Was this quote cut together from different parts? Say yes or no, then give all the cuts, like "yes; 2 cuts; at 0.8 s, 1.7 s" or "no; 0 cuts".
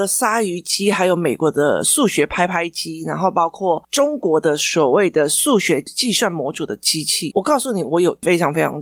no; 0 cuts